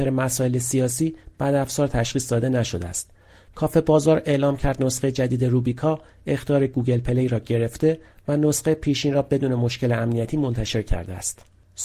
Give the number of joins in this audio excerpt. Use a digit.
0